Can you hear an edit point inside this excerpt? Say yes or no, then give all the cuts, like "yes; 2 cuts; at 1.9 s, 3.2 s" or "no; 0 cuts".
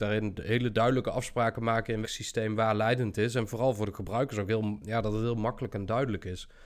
yes; 1 cut; at 2.0 s